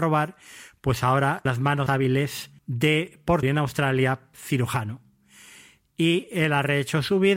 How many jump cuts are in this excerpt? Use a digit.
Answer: 5